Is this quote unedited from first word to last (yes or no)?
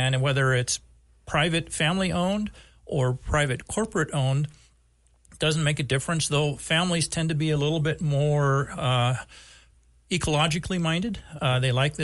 yes